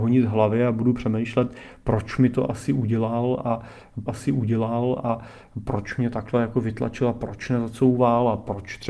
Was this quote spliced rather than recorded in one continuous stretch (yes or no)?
yes